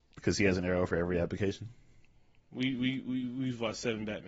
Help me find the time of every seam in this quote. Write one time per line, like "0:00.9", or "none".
none